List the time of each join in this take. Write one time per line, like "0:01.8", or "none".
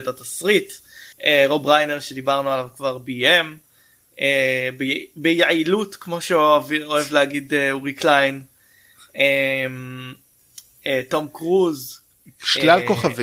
0:01.1